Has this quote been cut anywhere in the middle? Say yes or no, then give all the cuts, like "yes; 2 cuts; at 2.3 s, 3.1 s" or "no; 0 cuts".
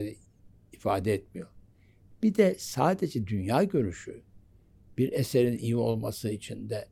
no; 0 cuts